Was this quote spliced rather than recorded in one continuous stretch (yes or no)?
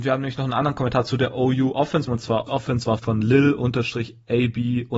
yes